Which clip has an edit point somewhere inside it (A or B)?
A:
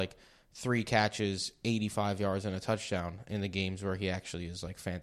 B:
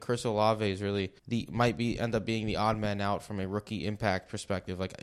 B